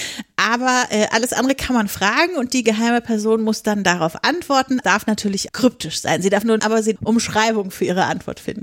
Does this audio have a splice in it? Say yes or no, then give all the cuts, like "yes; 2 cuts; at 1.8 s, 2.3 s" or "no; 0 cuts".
yes; 4 cuts; at 4.8 s, 5.5 s, 6.6 s, 7.0 s